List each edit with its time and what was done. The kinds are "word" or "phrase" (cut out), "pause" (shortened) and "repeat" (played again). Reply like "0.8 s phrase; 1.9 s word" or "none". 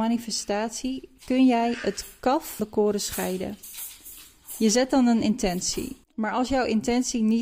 2.6 s word; 6.0 s pause